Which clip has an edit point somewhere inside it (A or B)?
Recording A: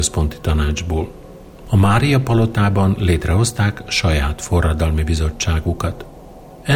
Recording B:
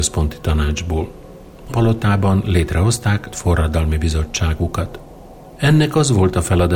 B